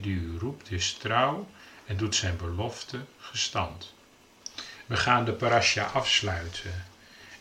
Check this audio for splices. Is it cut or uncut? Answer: uncut